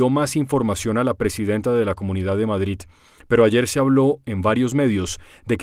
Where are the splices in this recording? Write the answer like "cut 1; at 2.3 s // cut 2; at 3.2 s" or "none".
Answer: none

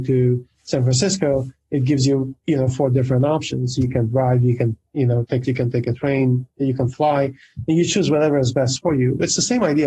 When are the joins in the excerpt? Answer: cut 1; at 5.4 s

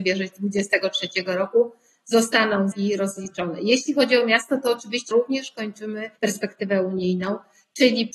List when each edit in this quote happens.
cut 1; at 2.7 s // cut 2; at 5.1 s // cut 3; at 6.2 s

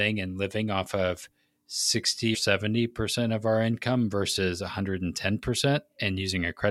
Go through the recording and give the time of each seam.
cut 1; at 2.3 s

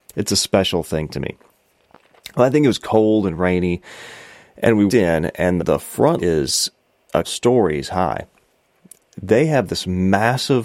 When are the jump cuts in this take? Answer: cut 1; at 4.9 s // cut 2; at 5.6 s // cut 3; at 6.2 s // cut 4; at 7.2 s

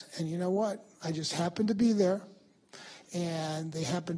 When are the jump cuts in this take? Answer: cut 1; at 0.9 s

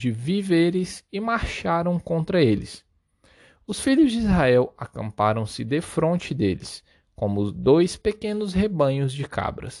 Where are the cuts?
none

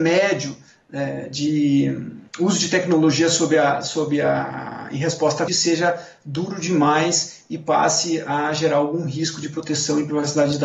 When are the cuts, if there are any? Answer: cut 1; at 2.3 s // cut 2; at 5.5 s

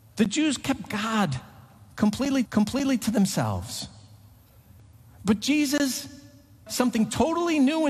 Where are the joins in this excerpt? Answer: cut 1; at 2.5 s // cut 2; at 6.7 s

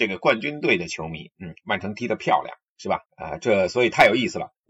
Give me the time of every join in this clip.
cut 1; at 3.1 s

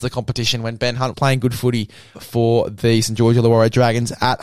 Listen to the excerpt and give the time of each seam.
cut 1; at 1.1 s // cut 2; at 2.1 s

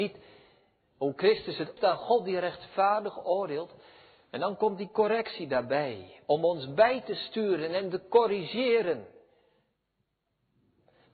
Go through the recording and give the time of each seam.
cut 1; at 1.8 s

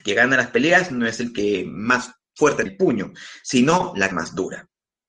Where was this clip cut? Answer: cut 1; at 2.7 s // cut 2; at 4.1 s

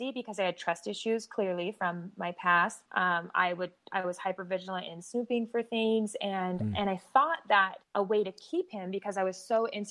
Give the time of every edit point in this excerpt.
cut 1; at 2.9 s // cut 2; at 7.8 s

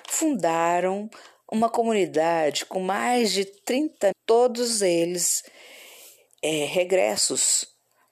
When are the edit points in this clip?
cut 1; at 4.1 s

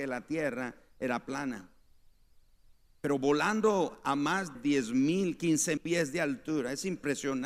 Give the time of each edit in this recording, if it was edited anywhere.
cut 1; at 4.6 s // cut 2; at 5.8 s

